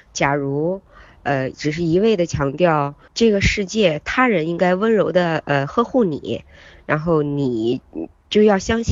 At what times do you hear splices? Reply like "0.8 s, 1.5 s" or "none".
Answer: 3.1 s